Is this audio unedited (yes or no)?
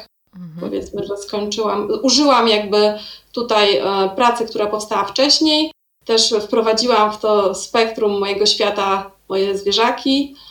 yes